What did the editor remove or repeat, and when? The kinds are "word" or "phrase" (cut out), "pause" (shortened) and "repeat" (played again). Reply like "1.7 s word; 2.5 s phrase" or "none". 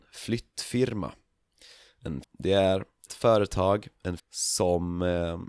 2.2 s word; 3.1 s word; 4.2 s word